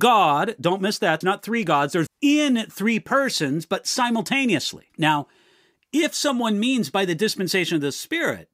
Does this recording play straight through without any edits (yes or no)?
no